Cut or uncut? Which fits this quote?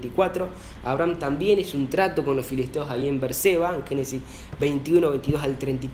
uncut